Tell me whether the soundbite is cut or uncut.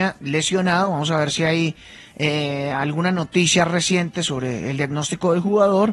uncut